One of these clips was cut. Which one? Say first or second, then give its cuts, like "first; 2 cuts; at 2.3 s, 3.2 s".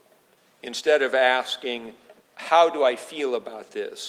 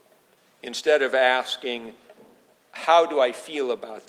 first; 1 cut; at 2.2 s